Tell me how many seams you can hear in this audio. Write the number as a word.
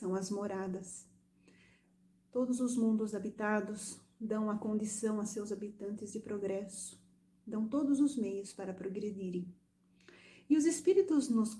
zero